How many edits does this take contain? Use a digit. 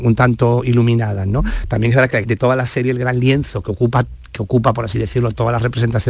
1